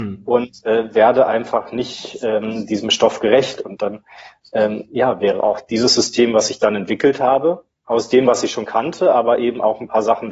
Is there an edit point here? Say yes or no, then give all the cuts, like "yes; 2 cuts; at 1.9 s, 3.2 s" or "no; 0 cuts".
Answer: no; 0 cuts